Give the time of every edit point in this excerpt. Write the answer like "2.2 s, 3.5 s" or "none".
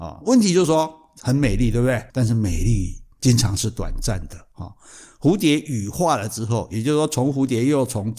2.1 s, 3.1 s